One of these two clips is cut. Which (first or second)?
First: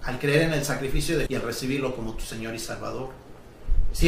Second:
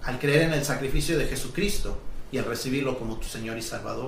first